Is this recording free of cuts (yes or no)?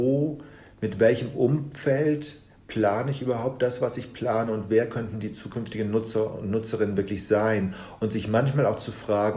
yes